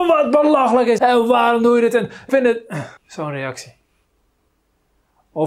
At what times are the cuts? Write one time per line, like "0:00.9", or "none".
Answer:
0:01.0
0:02.3
0:03.0